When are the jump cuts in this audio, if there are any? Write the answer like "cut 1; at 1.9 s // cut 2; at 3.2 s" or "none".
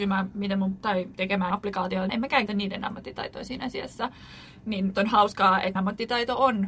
cut 1; at 1.5 s // cut 2; at 2.1 s // cut 3; at 2.5 s // cut 4; at 4.9 s // cut 5; at 5.8 s